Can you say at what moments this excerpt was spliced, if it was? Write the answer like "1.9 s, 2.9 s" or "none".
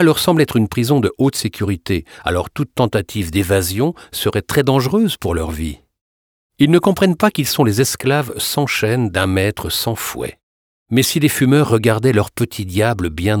none